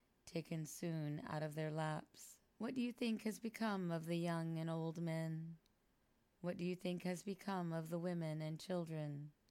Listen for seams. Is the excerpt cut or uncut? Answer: cut